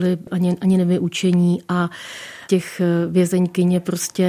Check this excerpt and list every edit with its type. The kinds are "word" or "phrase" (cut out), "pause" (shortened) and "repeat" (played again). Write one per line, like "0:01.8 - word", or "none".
0:02.5 - word